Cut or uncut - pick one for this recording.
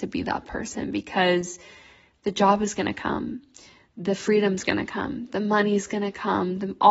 uncut